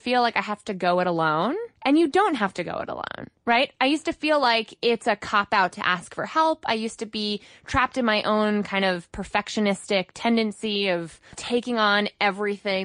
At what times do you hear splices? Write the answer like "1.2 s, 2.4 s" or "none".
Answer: 1.8 s